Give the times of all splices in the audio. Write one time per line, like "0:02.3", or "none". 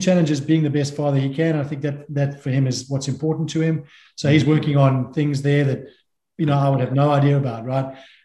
none